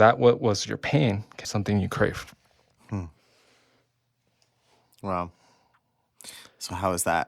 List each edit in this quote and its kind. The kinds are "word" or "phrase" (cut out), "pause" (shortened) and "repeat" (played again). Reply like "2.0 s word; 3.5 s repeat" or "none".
1.4 s word